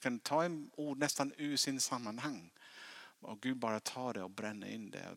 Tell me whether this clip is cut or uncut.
uncut